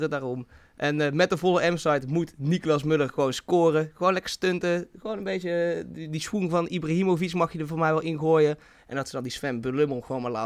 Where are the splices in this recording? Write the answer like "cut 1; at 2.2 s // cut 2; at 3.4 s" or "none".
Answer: none